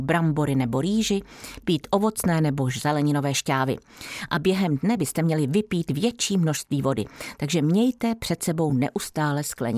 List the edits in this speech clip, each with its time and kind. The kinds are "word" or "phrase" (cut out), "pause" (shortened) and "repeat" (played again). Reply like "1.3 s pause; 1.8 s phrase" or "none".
none